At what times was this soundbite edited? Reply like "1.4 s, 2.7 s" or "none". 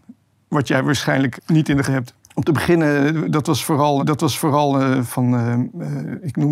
1.4 s, 1.8 s, 2.2 s, 4.0 s